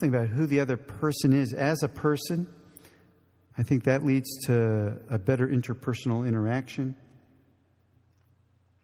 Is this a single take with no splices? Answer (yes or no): yes